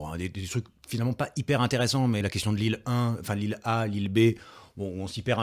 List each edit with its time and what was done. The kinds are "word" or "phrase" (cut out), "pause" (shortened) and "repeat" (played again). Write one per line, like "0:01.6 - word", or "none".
0:02.2 - word